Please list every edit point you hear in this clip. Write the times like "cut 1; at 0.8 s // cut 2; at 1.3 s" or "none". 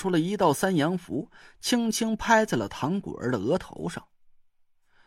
none